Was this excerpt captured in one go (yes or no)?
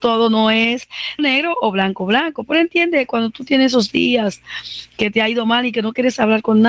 no